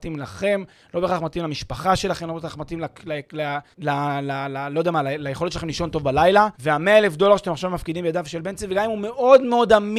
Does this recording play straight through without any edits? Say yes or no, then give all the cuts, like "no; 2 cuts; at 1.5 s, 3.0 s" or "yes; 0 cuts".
no; 2 cuts; at 3.7 s, 6.5 s